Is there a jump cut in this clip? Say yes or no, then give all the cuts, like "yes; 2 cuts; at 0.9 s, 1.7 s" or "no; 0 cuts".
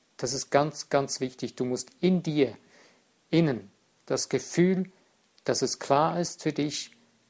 no; 0 cuts